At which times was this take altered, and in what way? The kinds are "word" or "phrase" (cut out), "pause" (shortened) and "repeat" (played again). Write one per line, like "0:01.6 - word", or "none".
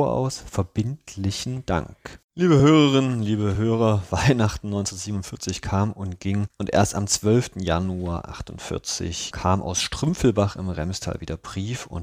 none